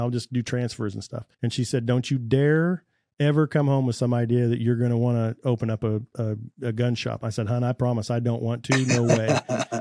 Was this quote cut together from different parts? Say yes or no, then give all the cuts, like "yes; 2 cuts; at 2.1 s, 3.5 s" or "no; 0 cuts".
yes; 1 cut; at 1.3 s